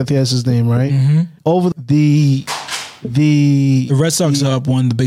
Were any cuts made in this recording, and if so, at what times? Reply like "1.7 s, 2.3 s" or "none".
1.4 s, 1.7 s